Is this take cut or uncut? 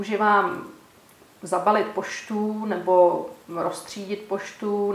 uncut